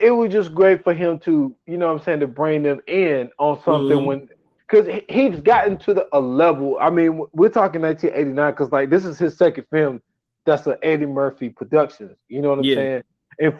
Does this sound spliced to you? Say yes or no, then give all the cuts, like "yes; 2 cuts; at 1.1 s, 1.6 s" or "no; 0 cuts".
no; 0 cuts